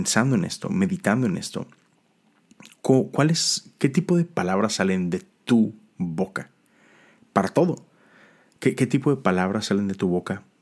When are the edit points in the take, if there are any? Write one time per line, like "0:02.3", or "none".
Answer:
none